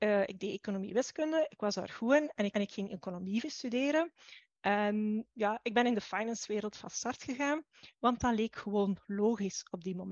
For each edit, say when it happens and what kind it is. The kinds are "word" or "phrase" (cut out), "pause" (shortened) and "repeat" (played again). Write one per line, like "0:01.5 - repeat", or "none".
0:02.5 - repeat
0:05.3 - word